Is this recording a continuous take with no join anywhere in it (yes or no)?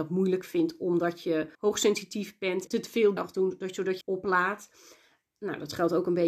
no